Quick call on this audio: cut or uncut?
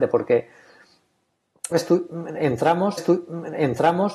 cut